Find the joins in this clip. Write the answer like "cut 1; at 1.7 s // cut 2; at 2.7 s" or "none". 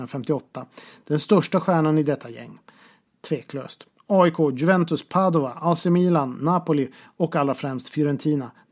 none